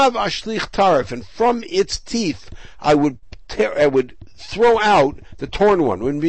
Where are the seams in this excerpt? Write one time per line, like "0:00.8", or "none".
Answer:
none

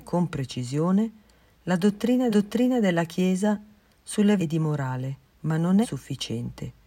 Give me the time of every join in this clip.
0:02.3
0:04.4
0:05.3
0:05.8

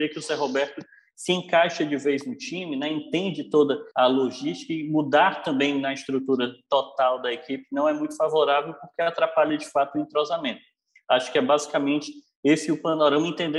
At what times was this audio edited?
0:03.9

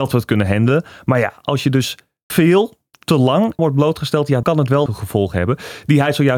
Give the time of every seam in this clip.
0:02.3
0:03.6
0:04.4
0:04.9

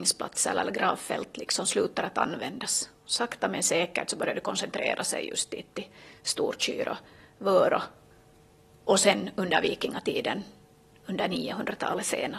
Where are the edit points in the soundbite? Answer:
none

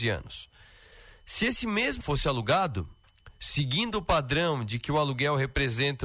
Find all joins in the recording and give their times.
0:02.0

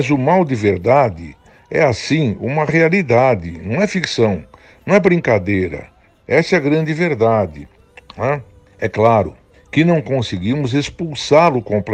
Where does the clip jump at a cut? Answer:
none

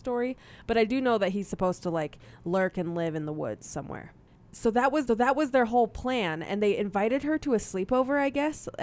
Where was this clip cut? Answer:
0:05.1

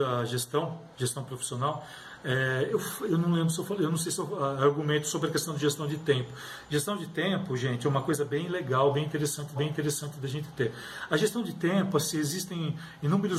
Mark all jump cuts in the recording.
0:00.9
0:09.6

